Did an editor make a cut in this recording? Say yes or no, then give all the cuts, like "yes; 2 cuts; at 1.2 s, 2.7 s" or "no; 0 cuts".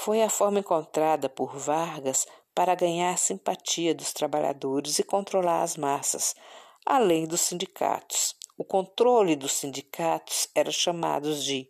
no; 0 cuts